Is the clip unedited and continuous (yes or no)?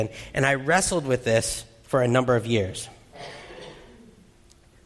yes